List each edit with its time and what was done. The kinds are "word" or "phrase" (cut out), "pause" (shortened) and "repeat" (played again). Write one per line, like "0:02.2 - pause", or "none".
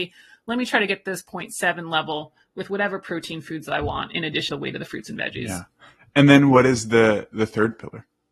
0:04.5 - word